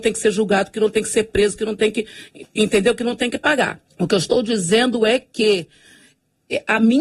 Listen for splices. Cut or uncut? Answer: cut